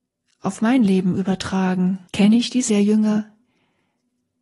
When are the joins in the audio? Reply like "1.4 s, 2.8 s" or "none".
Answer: 2.1 s, 2.7 s